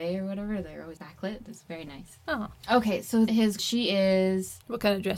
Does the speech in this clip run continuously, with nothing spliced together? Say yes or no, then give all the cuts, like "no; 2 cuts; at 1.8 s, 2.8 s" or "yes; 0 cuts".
no; 3 cuts; at 1.0 s, 3.3 s, 3.6 s